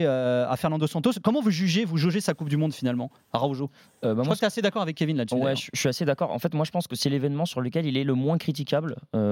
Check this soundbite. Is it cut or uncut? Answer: uncut